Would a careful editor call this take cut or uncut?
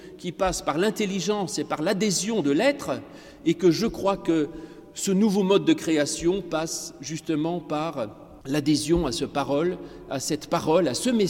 cut